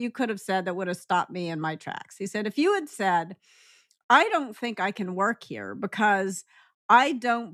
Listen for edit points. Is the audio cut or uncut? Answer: uncut